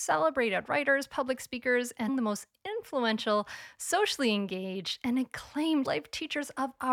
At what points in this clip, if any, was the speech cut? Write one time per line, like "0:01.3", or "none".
0:02.1
0:05.8